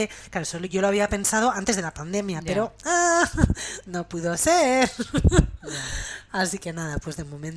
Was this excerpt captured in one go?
yes; 0 cuts

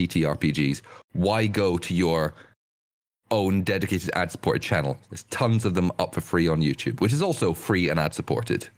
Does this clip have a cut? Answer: no; 0 cuts

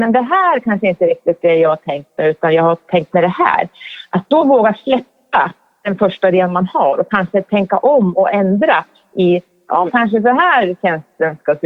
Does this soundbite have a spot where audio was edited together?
yes; 1 cut; at 9.9 s

